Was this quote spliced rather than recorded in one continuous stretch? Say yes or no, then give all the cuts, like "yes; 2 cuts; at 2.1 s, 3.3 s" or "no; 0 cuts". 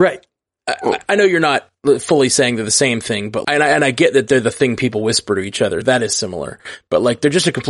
yes; 2 cuts; at 3.4 s, 5.8 s